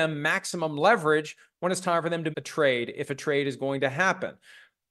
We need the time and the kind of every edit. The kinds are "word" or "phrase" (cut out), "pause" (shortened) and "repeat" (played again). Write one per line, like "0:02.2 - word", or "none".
0:02.3 - word